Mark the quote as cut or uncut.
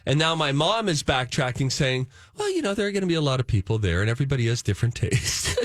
uncut